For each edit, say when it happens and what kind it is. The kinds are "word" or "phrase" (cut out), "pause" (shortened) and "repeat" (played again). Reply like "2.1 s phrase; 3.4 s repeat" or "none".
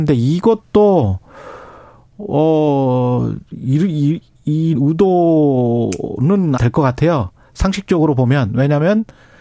4.7 s word; 6.6 s word